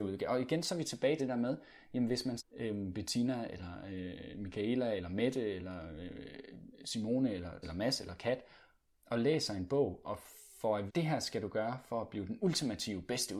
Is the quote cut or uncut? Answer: cut